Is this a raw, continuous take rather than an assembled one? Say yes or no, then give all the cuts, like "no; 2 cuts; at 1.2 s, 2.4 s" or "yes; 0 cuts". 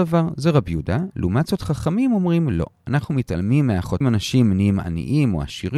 no; 1 cut; at 4.0 s